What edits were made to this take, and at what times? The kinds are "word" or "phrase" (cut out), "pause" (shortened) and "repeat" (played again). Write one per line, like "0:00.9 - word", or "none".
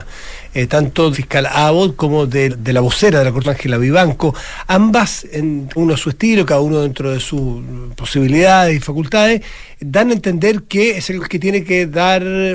0:01.1 - word
0:02.5 - word
0:03.4 - word
0:05.8 - word
0:11.2 - word